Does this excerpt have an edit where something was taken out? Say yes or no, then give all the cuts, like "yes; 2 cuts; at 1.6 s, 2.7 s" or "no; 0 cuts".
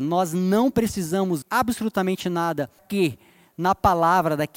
yes; 2 cuts; at 1.4 s, 2.8 s